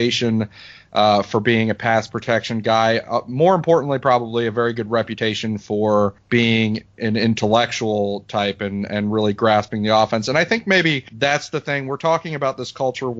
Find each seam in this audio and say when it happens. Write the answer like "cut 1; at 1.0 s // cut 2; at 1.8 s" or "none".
none